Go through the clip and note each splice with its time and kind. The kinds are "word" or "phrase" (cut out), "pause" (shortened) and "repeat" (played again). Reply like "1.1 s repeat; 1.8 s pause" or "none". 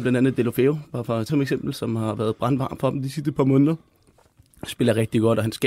1.3 s word